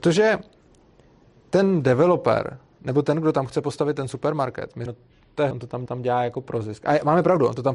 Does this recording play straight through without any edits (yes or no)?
no